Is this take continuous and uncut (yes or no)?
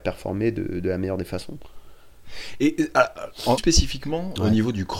no